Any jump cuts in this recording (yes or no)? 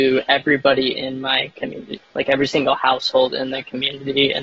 no